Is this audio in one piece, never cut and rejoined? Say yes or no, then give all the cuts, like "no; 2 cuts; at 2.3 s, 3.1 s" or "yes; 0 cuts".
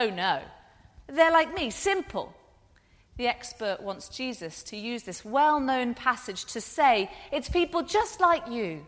yes; 0 cuts